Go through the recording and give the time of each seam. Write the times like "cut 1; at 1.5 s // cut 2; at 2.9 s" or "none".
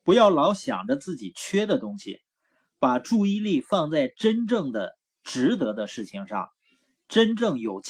none

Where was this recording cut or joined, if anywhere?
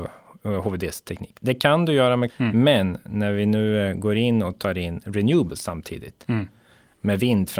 cut 1; at 2.3 s

